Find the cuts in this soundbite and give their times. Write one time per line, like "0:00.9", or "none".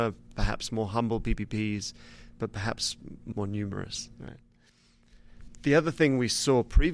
none